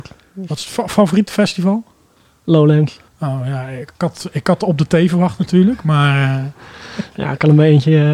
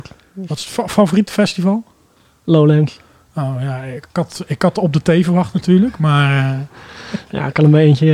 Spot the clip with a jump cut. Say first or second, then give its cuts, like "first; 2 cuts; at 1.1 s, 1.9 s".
first; 1 cut; at 3.1 s